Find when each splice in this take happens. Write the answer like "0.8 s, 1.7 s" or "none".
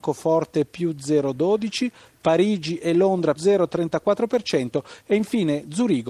3.3 s